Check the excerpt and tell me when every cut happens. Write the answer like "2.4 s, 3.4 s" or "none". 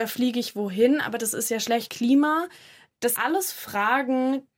1.9 s, 3.2 s